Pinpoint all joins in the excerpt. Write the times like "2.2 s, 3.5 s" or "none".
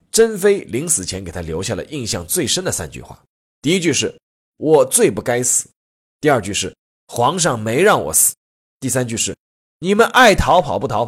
8.4 s